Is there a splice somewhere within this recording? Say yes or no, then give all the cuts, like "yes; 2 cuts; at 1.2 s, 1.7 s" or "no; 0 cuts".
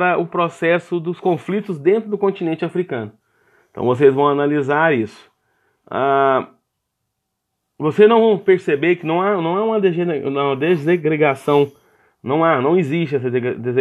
no; 0 cuts